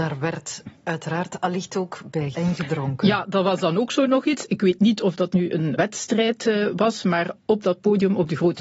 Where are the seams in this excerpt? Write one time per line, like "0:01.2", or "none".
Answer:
0:02.3
0:05.3
0:05.8